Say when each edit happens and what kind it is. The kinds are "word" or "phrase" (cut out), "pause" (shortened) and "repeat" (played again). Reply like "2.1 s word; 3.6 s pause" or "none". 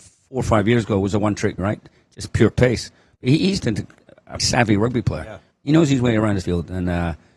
1.6 s word; 3.6 s word; 4.4 s word; 6.4 s word